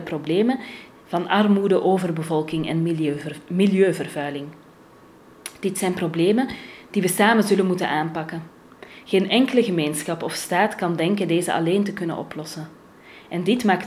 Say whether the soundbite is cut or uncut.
uncut